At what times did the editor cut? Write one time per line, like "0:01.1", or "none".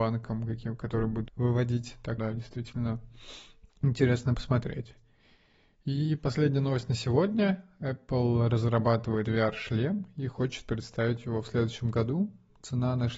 0:01.3
0:02.2
0:03.7